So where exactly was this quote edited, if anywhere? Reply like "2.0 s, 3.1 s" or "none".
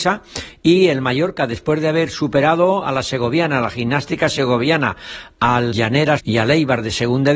5.7 s, 6.2 s